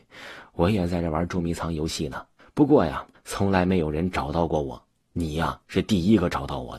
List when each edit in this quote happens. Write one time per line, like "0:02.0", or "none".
0:02.4
0:03.1
0:05.6